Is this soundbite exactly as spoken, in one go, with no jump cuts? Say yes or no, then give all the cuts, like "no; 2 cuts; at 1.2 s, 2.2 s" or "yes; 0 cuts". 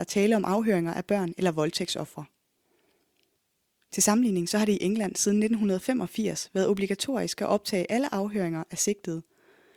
yes; 0 cuts